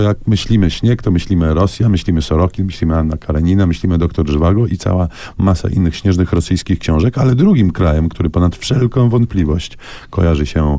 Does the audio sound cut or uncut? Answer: uncut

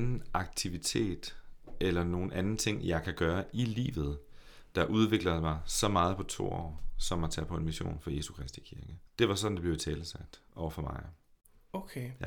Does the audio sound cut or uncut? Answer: cut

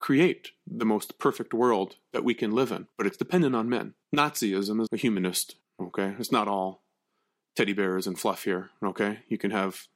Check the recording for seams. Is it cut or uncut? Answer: cut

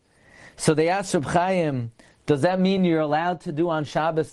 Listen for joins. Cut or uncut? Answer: uncut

